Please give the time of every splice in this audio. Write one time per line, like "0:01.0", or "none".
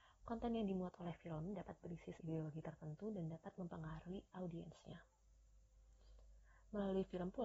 0:02.2